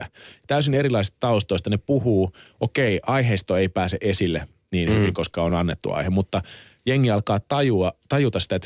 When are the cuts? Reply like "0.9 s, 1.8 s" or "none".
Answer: none